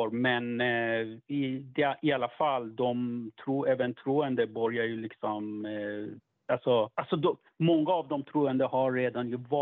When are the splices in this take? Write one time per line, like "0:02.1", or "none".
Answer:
0:06.9